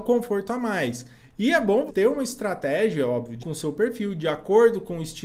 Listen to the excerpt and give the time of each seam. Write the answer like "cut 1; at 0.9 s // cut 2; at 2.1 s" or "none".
cut 1; at 1.9 s // cut 2; at 3.4 s